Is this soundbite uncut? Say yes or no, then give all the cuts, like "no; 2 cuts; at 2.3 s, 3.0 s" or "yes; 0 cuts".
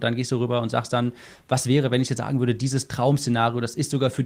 yes; 0 cuts